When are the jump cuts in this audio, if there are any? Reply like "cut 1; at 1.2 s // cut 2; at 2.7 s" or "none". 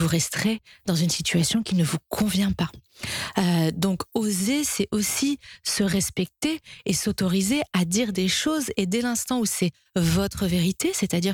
none